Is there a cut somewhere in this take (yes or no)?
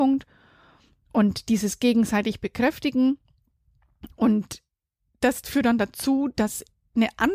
no